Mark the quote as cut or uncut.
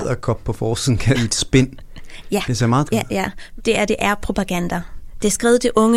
cut